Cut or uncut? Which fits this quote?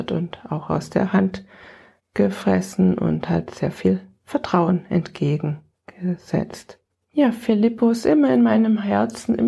uncut